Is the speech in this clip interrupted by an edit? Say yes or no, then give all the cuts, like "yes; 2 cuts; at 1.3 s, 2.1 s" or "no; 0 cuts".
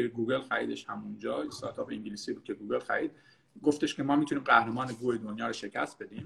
no; 0 cuts